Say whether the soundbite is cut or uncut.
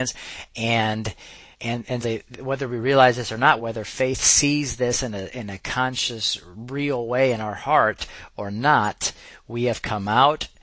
cut